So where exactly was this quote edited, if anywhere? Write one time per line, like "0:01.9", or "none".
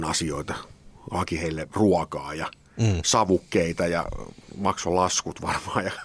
none